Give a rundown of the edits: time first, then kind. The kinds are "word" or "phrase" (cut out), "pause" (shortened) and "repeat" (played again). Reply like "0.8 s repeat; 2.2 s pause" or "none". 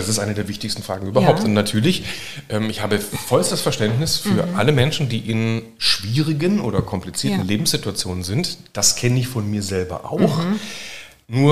none